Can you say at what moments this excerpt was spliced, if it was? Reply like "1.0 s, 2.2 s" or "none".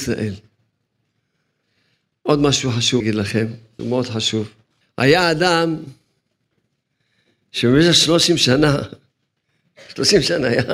3.0 s, 3.8 s, 4.7 s